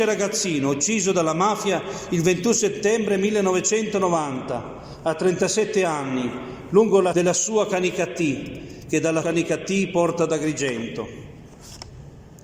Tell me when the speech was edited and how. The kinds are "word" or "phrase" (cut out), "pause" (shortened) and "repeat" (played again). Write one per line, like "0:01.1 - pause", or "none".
0:07.1 - word
0:09.2 - word